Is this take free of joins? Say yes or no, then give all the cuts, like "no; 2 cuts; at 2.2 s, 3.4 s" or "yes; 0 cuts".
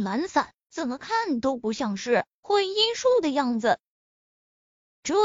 yes; 0 cuts